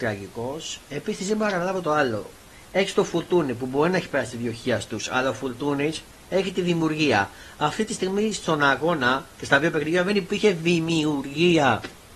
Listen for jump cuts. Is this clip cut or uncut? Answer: uncut